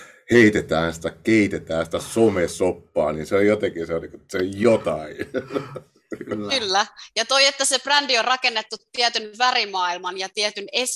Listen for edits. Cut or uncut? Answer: uncut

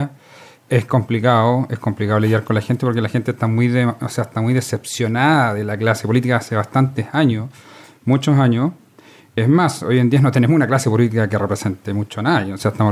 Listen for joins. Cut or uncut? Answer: uncut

